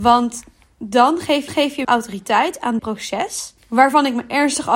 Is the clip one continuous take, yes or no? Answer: no